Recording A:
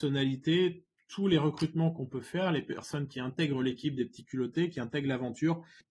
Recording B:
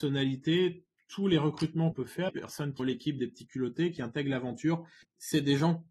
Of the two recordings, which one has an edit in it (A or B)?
B